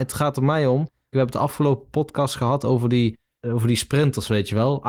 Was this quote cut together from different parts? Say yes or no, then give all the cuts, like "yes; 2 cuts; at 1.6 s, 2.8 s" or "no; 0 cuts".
no; 0 cuts